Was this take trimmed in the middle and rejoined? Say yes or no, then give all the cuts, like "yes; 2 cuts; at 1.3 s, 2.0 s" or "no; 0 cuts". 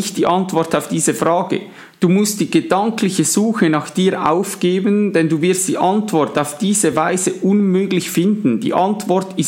no; 0 cuts